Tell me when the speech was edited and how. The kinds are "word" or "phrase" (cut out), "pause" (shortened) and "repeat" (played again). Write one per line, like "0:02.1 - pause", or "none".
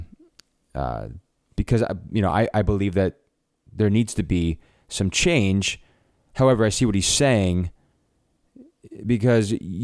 none